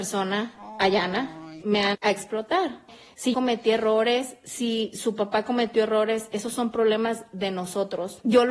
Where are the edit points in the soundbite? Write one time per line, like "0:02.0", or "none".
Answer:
0:01.6
0:01.9
0:03.3